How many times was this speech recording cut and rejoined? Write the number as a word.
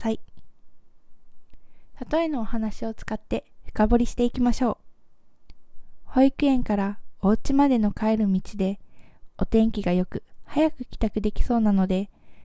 zero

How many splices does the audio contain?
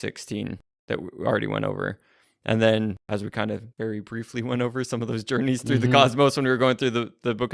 one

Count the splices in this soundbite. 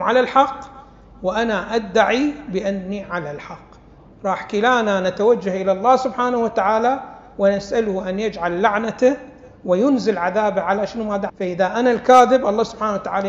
one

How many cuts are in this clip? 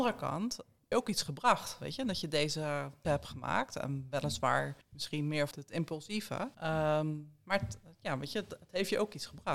five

